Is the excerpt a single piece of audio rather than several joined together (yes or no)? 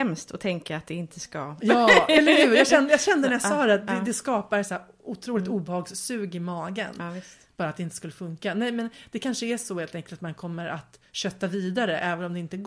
yes